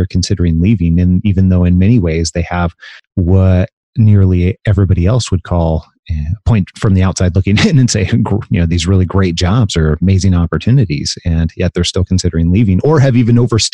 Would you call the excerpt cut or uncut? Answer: uncut